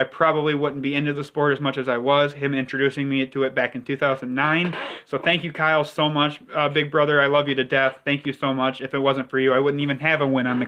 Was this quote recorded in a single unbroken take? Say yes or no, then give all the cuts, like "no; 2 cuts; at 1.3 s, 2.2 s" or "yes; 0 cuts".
yes; 0 cuts